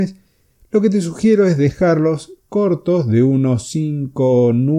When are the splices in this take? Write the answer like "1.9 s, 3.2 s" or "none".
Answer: none